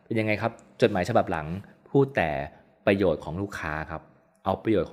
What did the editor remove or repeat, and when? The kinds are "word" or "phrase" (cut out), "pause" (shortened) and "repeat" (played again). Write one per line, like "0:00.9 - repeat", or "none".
none